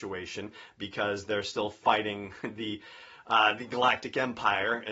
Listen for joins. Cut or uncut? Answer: uncut